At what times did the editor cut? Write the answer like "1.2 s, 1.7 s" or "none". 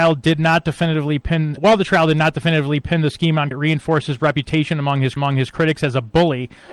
1.6 s, 3.5 s, 5.2 s